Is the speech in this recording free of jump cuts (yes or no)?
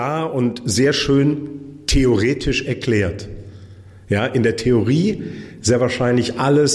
yes